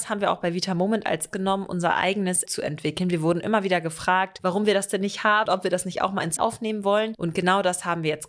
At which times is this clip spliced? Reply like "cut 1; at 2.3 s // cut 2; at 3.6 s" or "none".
cut 1; at 1.3 s // cut 2; at 2.5 s // cut 3; at 5.5 s // cut 4; at 6.4 s